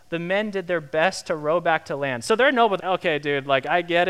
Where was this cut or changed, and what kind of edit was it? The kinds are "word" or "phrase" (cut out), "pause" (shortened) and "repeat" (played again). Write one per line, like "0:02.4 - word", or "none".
0:02.8 - word